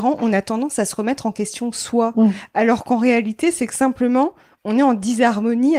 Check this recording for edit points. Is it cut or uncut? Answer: uncut